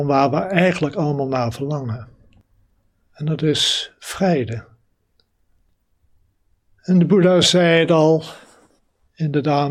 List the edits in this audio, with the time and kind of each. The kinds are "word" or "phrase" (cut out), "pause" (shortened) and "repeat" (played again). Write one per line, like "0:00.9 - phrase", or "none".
none